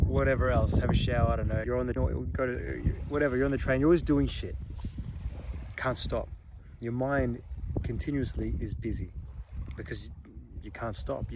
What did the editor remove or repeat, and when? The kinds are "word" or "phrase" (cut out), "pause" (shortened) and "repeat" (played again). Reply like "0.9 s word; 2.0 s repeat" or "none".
1.6 s phrase; 2.0 s word